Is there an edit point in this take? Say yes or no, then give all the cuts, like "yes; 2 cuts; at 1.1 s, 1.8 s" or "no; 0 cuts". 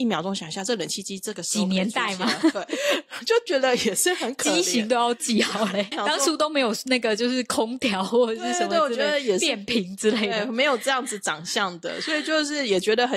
yes; 1 cut; at 5.9 s